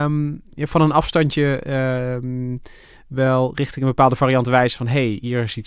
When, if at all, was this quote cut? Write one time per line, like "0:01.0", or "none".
none